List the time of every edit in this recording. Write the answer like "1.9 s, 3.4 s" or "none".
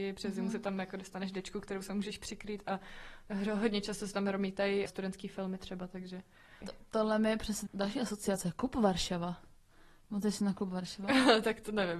4.9 s, 6.6 s, 7.7 s